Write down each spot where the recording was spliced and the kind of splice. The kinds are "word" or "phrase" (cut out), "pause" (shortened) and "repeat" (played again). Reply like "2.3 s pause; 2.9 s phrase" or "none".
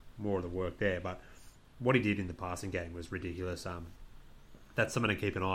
none